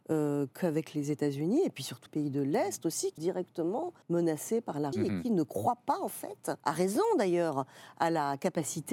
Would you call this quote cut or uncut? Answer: cut